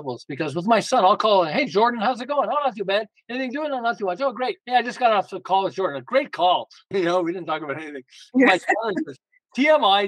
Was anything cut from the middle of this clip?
yes; 2 cuts; at 4.6 s, 6.9 s

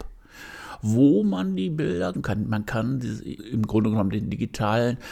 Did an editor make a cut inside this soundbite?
yes; 2 cuts; at 2.1 s, 3.4 s

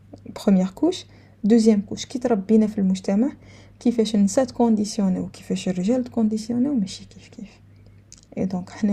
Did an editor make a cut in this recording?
no; 0 cuts

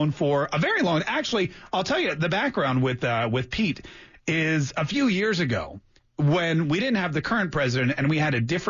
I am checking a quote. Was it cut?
no; 0 cuts

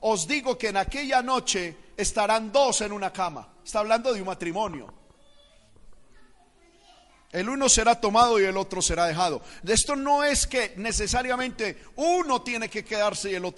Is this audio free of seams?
yes; 0 cuts

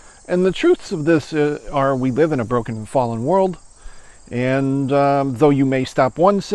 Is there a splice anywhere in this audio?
no; 0 cuts

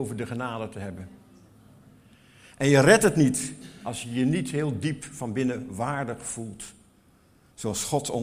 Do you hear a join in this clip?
no; 0 cuts

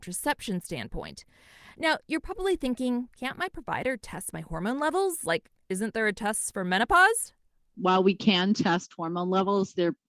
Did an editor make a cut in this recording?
no; 0 cuts

